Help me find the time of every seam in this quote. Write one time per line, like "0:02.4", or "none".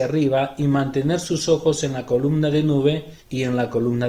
0:03.2